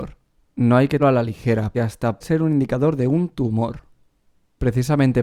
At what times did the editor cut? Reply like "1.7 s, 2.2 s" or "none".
1.0 s, 1.7 s, 2.2 s

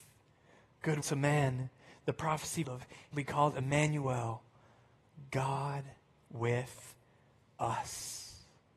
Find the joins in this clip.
1.0 s, 2.6 s, 3.1 s

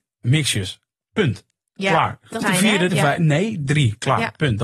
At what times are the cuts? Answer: 2.4 s, 2.9 s

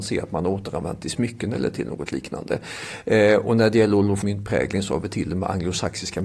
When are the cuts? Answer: 4.2 s

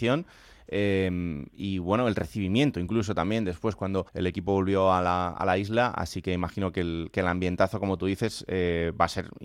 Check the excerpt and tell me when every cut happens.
4.1 s

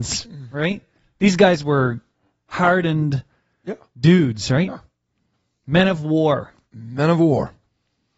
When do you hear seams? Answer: none

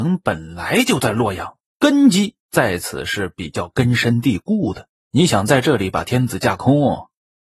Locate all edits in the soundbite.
1.7 s, 2.4 s, 5.0 s

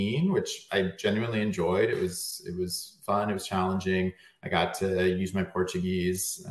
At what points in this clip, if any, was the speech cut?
none

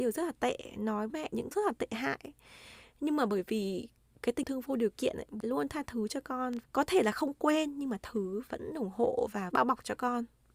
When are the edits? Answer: 1.1 s, 1.5 s, 4.4 s, 5.4 s, 6.6 s, 8.0 s, 8.5 s, 9.5 s

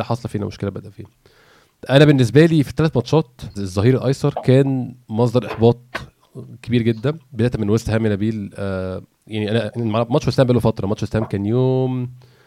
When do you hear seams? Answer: 3.6 s, 5.0 s

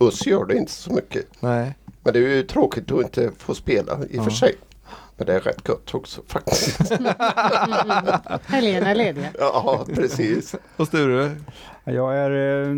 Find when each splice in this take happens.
1.3 s, 5.1 s

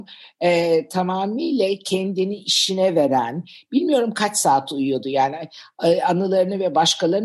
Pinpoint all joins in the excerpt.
none

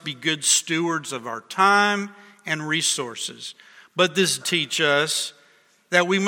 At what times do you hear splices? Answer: 4.4 s

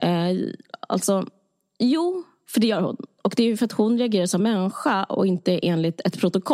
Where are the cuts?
4.4 s

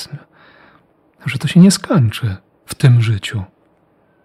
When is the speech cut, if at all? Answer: none

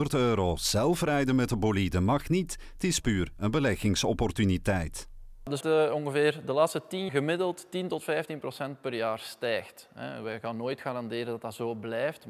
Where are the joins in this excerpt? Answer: 5.6 s, 7.1 s

